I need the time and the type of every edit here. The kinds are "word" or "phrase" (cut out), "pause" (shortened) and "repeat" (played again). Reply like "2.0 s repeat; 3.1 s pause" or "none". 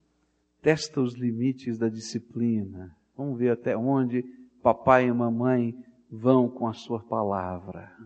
none